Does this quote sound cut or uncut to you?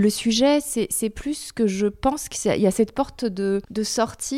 uncut